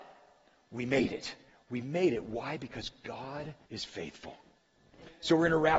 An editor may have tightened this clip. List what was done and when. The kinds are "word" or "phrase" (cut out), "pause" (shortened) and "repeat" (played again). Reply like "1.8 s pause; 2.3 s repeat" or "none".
1.5 s pause; 3.6 s pause